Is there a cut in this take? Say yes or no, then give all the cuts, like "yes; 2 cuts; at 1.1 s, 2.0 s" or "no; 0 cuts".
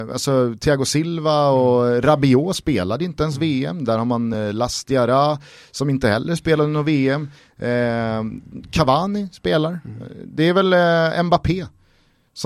no; 0 cuts